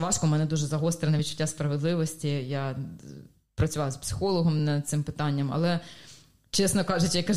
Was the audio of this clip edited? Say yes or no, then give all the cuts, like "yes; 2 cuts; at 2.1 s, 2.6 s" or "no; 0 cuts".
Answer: no; 0 cuts